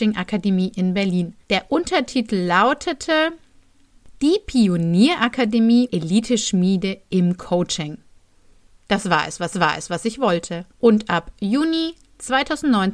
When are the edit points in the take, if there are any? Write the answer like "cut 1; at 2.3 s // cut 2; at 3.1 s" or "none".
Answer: cut 1; at 1.4 s // cut 2; at 5.9 s // cut 3; at 9.5 s // cut 4; at 10.7 s